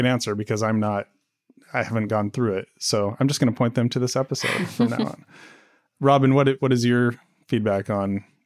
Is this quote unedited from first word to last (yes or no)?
yes